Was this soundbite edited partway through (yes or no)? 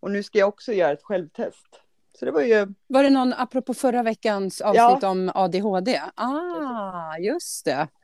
no